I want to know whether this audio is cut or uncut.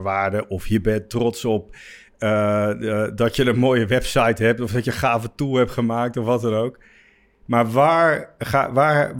uncut